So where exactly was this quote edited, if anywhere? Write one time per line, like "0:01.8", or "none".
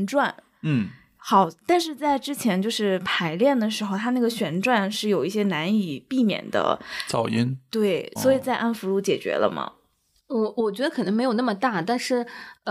0:08.2